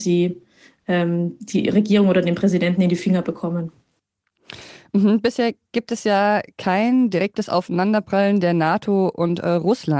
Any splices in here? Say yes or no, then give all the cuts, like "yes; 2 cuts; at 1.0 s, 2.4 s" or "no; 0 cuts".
no; 0 cuts